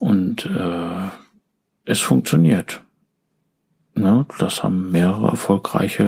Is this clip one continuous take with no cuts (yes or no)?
yes